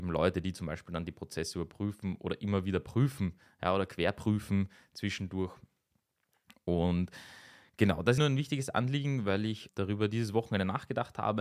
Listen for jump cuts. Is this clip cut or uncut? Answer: cut